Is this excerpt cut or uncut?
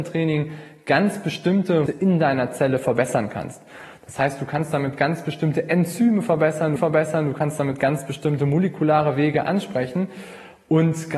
cut